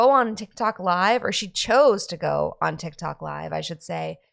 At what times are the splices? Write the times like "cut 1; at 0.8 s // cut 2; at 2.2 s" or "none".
none

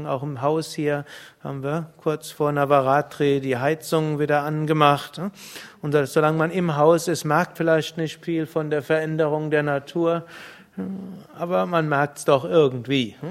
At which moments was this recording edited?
cut 1; at 7.6 s

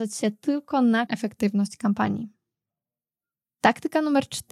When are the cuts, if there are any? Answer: cut 1; at 1.1 s

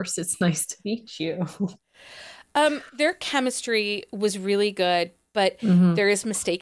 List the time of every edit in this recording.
cut 1; at 2.9 s

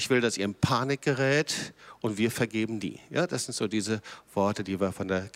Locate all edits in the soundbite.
none

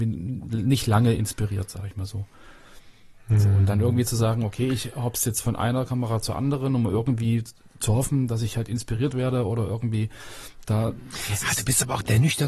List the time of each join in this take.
none

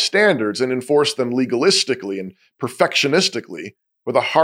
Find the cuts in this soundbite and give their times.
none

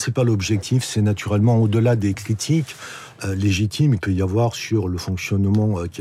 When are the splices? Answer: cut 1; at 4.0 s

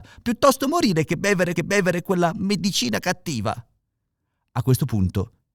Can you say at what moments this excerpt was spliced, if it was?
cut 1; at 1.6 s

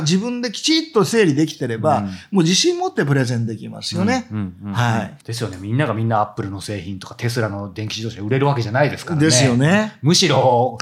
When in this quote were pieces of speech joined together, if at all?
cut 1; at 5.2 s

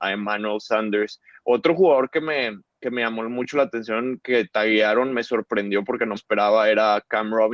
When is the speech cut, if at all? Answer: cut 1; at 2.7 s // cut 2; at 6.2 s

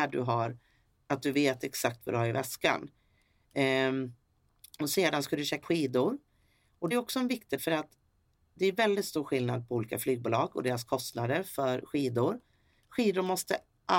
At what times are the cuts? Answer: cut 1; at 5.6 s // cut 2; at 6.9 s // cut 3; at 7.6 s

